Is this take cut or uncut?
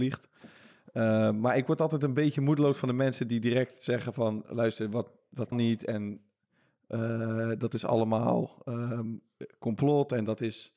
cut